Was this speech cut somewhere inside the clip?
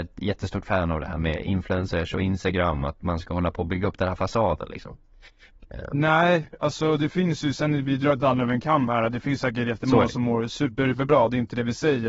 no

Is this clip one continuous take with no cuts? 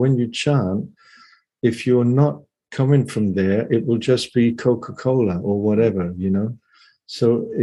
yes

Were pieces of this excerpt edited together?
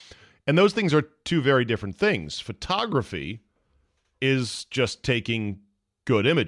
no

